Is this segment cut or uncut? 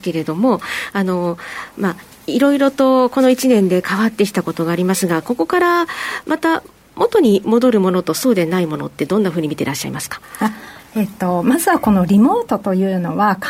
uncut